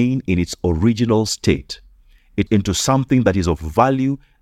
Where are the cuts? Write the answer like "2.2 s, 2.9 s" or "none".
2.5 s